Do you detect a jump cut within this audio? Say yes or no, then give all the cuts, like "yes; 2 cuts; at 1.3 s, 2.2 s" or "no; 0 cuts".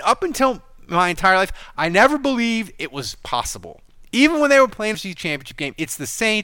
yes; 1 cut; at 4.9 s